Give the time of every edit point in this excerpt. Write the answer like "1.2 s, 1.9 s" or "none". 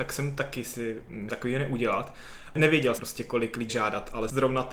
1.3 s, 3.0 s, 3.7 s